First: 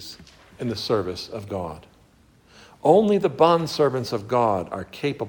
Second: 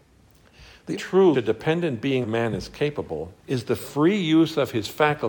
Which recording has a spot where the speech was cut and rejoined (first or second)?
second